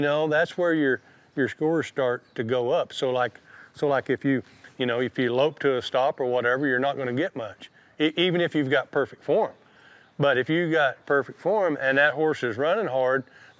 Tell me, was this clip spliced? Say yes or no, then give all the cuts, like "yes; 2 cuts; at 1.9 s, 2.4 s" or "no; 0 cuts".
no; 0 cuts